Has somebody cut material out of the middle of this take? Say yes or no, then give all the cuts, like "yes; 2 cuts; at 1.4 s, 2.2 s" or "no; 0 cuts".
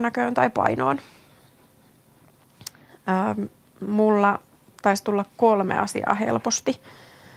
no; 0 cuts